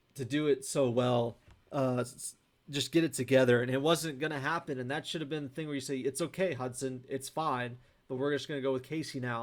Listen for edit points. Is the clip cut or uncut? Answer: uncut